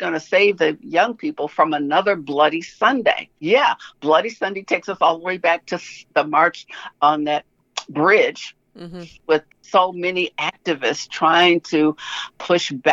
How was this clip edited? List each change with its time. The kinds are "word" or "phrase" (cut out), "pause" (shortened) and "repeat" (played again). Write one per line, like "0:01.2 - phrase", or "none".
0:03.4 - pause